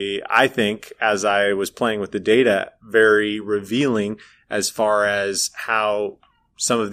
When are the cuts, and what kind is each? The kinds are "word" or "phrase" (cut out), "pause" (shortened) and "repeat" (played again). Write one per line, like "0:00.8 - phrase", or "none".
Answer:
none